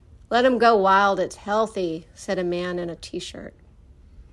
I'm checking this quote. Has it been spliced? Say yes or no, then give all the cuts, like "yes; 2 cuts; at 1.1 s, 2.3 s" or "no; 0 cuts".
yes; 1 cut; at 3.0 s